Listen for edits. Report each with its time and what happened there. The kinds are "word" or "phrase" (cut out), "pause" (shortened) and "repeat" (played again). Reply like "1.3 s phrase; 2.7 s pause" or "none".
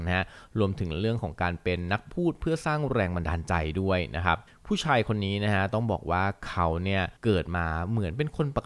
4.5 s pause; 7.2 s pause